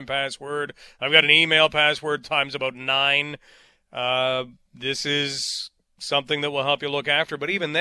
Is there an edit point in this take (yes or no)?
no